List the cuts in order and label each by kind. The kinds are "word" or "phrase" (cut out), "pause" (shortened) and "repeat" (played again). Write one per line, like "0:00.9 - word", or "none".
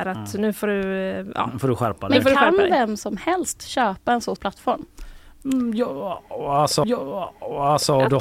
0:04.4 - word
0:06.8 - repeat